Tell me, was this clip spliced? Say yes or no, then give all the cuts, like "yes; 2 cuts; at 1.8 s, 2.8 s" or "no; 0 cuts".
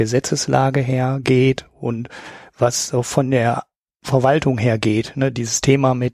no; 0 cuts